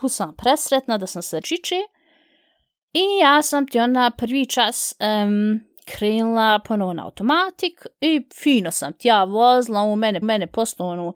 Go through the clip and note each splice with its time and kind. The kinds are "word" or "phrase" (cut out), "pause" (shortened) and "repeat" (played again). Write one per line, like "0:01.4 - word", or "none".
0:01.4 - phrase
0:10.2 - repeat